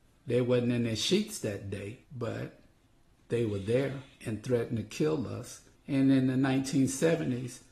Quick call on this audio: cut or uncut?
cut